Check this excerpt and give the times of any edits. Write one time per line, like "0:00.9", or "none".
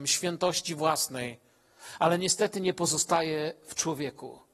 none